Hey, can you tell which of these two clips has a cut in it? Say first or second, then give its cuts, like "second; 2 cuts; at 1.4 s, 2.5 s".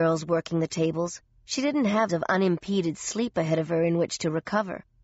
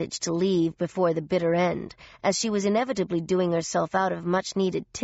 first; 1 cut; at 2.1 s